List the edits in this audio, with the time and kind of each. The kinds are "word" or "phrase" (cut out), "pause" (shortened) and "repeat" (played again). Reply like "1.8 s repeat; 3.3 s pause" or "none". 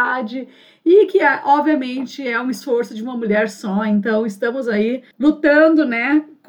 5.1 s pause